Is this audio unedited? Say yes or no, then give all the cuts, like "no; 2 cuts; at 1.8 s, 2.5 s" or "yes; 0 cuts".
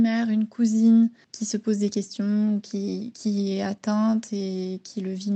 yes; 0 cuts